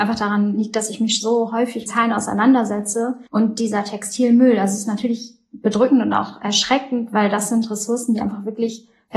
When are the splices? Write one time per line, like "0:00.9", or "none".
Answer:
0:01.9
0:03.3

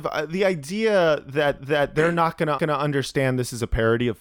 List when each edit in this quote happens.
0:01.6
0:02.6

